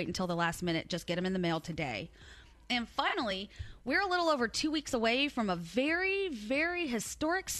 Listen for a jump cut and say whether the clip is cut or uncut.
uncut